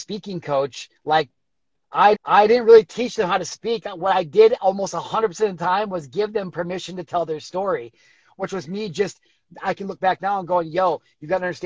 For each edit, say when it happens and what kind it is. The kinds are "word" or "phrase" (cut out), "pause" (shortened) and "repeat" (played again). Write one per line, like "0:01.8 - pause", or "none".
0:02.1 - repeat